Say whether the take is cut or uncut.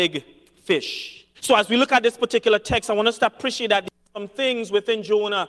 cut